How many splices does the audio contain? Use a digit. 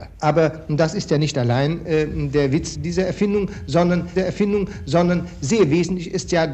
2